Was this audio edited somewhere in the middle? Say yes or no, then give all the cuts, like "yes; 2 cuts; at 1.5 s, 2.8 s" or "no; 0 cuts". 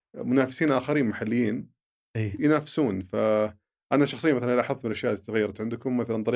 no; 0 cuts